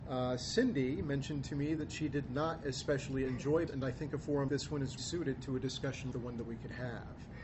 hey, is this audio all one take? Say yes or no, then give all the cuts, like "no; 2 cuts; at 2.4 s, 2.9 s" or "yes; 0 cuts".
no; 4 cuts; at 3.7 s, 4.5 s, 5.0 s, 6.1 s